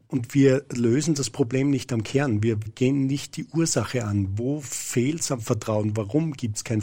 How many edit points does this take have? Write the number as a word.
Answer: one